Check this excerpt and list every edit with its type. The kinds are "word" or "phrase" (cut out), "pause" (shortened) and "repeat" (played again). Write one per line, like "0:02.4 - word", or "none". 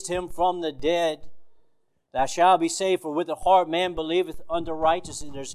none